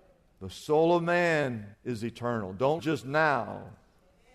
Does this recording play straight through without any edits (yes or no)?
no